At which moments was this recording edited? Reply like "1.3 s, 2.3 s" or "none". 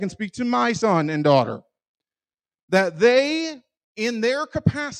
none